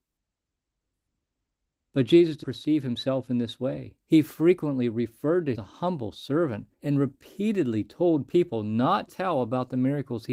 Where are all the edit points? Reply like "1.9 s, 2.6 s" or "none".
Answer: 2.4 s, 4.0 s, 5.5 s, 6.7 s, 9.1 s

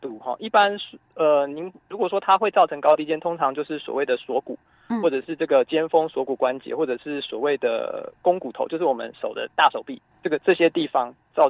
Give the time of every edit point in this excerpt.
none

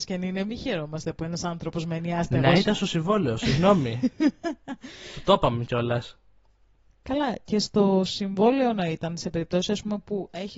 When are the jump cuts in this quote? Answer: none

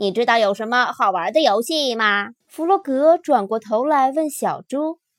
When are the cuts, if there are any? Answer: 2.4 s

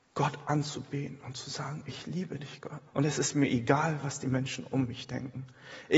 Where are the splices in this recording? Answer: 2.9 s

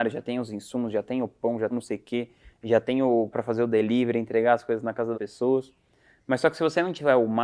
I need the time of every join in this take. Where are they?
1.7 s, 3.3 s, 5.1 s

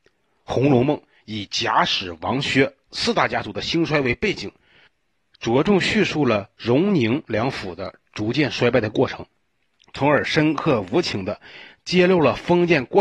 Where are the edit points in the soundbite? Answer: none

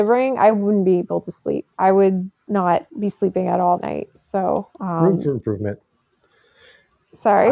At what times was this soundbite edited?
1.7 s, 2.9 s, 3.8 s, 4.7 s

